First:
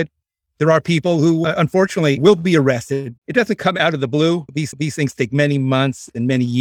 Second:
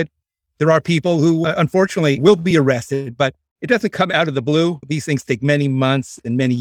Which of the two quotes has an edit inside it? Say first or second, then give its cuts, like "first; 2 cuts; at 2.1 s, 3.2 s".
first; 2 cuts; at 3.2 s, 4.7 s